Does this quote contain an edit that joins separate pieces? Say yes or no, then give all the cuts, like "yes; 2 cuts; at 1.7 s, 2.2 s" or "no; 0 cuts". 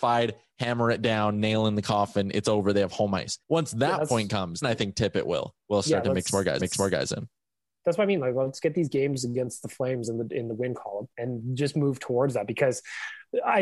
yes; 5 cuts; at 3.4 s, 4.6 s, 5.6 s, 6.6 s, 11.1 s